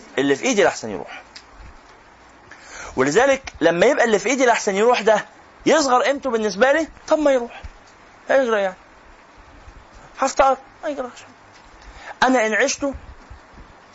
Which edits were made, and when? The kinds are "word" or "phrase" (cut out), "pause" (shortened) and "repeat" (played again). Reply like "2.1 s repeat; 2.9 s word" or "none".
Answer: none